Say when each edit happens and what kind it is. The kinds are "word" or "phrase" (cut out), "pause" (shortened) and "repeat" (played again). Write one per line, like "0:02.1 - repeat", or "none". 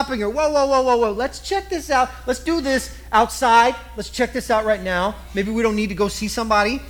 none